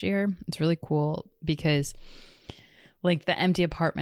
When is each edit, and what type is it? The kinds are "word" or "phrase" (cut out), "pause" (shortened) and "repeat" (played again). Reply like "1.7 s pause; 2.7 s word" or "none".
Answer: none